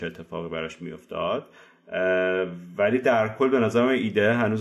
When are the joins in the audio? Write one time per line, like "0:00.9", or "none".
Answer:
none